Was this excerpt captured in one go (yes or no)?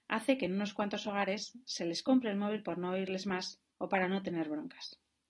no